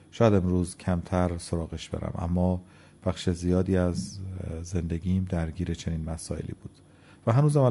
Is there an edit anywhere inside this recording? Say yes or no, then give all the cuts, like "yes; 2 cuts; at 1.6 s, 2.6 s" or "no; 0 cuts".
no; 0 cuts